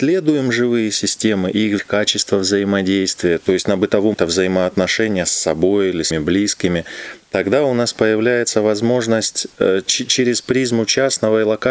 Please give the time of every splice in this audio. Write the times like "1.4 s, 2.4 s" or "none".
1.8 s, 4.1 s, 6.1 s